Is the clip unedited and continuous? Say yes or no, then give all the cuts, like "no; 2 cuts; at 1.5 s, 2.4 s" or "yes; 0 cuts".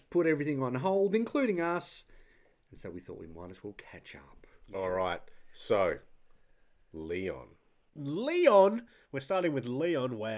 yes; 0 cuts